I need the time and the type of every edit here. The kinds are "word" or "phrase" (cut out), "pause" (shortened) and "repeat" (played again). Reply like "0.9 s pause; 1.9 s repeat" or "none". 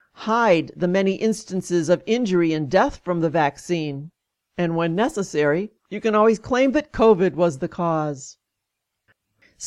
5.8 s pause